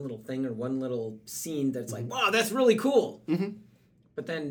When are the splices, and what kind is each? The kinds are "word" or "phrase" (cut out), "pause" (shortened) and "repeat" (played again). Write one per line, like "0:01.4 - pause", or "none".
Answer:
none

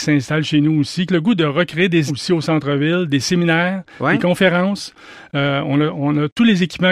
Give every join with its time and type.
0:01.1 - phrase
0:02.1 - word

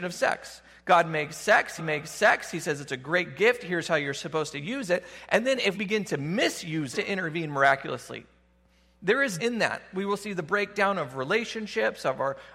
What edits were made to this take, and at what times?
0:01.8 - repeat
0:05.7 - word
0:06.9 - phrase
0:09.4 - word

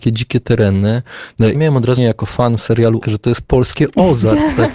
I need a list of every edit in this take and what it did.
0:01.5 - word
0:02.0 - word
0:03.0 - word

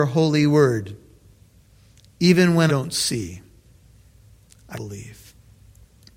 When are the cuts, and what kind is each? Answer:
0:02.7 - word
0:04.7 - word

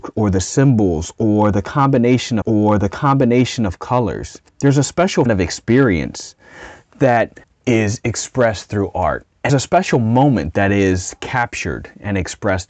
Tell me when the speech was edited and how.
0:02.4 - repeat
0:04.5 - pause
0:05.3 - phrase
0:07.4 - pause
0:09.5 - word

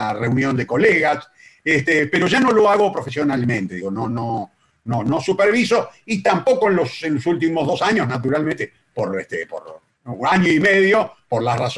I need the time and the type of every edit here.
none

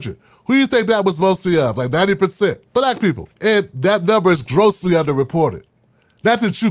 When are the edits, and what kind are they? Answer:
0:02.7 - pause
0:03.3 - pause

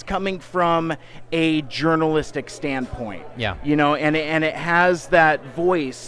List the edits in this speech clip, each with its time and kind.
none

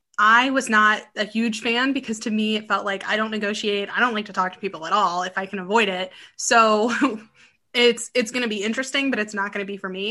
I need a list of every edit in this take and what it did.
none

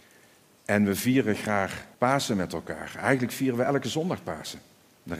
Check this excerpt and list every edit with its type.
0:01.9 - pause

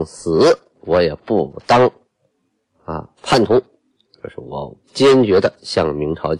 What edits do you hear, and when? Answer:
0:03.1 - pause
0:04.8 - pause

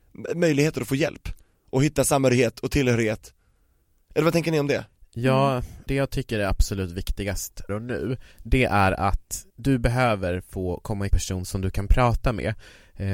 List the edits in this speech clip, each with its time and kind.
0:07.7 - word
0:08.3 - pause
0:09.5 - pause
0:11.1 - phrase

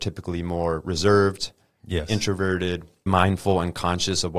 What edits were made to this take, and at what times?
0:03.1 - word

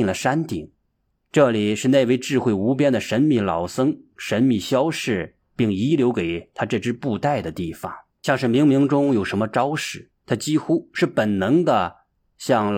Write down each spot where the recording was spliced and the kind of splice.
0:08.1 - pause
0:10.2 - pause

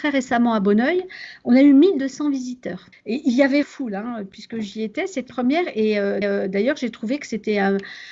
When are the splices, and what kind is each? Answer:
0:02.9 - pause
0:03.6 - word
0:05.3 - word
0:06.2 - repeat

